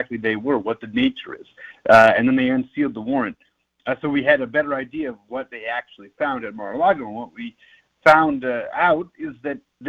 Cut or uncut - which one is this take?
uncut